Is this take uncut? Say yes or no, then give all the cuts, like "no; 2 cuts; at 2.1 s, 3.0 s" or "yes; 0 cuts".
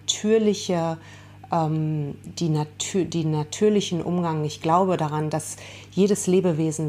no; 1 cut; at 2.2 s